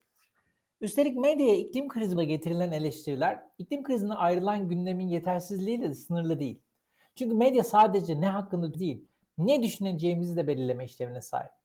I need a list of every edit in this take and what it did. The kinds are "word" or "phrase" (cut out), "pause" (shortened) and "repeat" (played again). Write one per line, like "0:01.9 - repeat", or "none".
0:02.2 - word
0:08.7 - word